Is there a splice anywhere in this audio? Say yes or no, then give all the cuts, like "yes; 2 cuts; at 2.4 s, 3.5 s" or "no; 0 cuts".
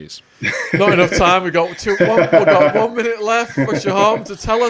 no; 0 cuts